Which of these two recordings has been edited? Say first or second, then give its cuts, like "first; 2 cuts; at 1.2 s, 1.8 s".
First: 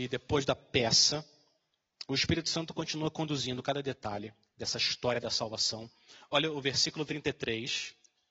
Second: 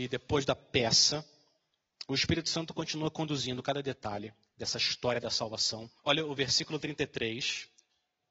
second; 1 cut; at 6.0 s